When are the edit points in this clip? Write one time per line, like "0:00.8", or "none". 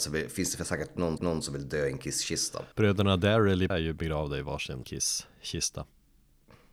0:01.2
0:02.7
0:03.7
0:04.8